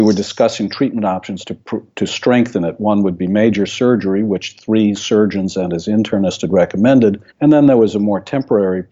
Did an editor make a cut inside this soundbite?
yes; 1 cut; at 7.3 s

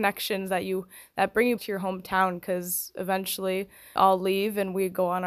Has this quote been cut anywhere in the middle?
yes; 2 cuts; at 1.6 s, 4.0 s

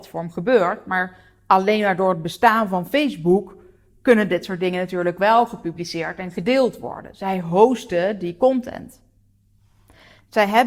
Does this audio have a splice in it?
no; 0 cuts

